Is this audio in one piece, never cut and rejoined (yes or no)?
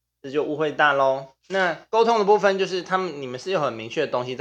no